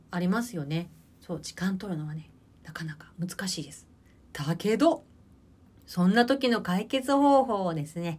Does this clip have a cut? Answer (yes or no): no